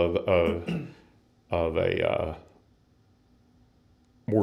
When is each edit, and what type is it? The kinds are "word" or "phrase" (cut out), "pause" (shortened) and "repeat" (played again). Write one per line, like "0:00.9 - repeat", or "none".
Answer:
none

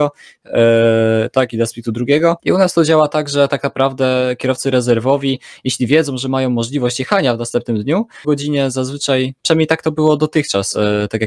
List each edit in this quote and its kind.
0:02.4 - pause
0:08.2 - phrase

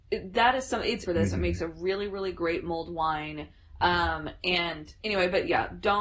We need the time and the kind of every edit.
0:01.1 - phrase

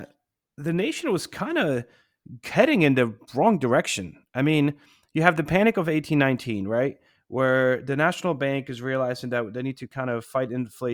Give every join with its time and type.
none

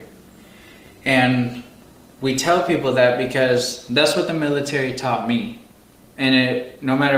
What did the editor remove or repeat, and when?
none

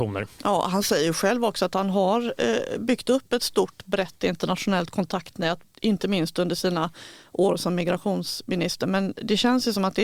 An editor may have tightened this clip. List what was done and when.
none

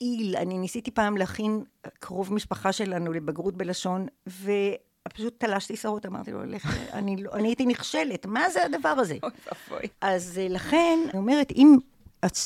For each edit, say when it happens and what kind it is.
0:07.4 - phrase
0:09.9 - word
0:11.1 - word

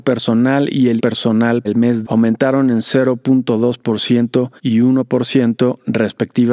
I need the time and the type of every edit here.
0:01.0 - word
0:01.6 - word
0:02.0 - phrase
0:04.6 - pause

